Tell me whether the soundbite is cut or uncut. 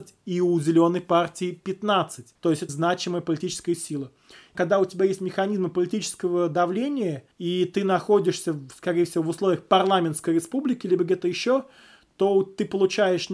cut